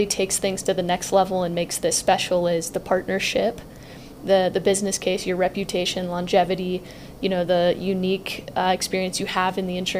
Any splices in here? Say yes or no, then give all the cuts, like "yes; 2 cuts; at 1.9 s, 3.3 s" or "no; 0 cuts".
no; 0 cuts